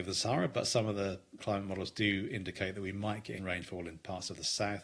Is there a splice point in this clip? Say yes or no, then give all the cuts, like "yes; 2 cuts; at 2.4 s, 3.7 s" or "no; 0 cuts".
yes; 2 cuts; at 1.4 s, 3.4 s